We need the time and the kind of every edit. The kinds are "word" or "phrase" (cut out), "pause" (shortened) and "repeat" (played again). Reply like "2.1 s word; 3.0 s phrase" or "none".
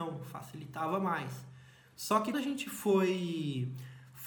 2.3 s word